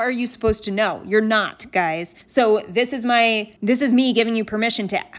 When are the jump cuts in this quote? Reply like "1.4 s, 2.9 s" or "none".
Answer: 2.2 s, 3.6 s